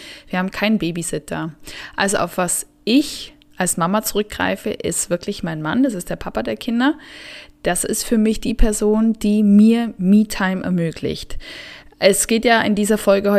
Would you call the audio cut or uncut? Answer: uncut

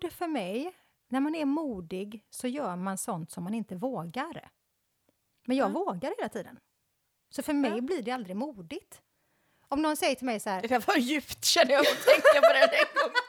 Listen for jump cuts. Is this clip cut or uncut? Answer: uncut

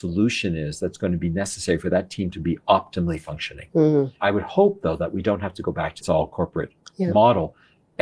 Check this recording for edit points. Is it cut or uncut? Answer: cut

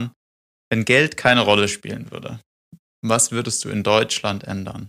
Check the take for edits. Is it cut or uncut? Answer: uncut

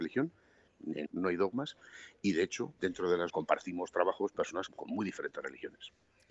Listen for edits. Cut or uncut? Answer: cut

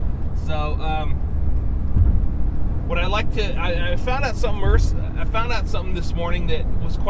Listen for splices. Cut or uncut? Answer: uncut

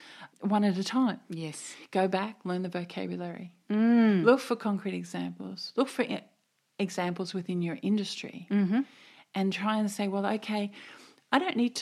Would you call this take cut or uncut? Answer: uncut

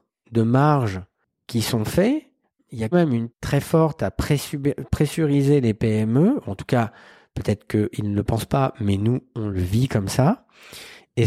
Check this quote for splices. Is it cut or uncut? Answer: cut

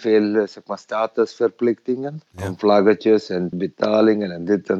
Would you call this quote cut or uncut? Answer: cut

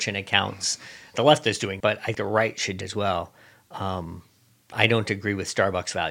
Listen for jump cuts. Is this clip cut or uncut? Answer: cut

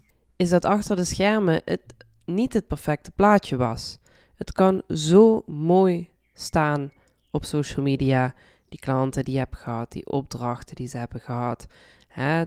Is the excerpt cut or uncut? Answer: uncut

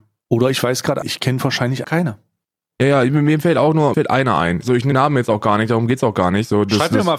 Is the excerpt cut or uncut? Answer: cut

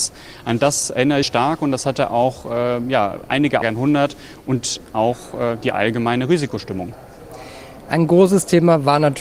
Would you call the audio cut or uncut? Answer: cut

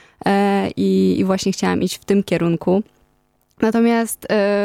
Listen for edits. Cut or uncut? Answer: uncut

